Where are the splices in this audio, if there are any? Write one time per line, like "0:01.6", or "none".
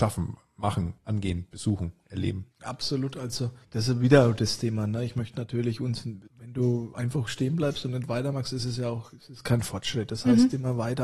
0:01.0
0:02.5
0:03.6
0:06.3